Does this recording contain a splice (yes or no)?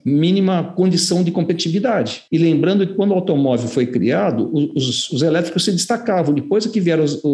yes